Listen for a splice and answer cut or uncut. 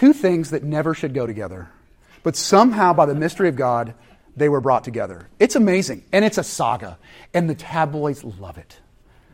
uncut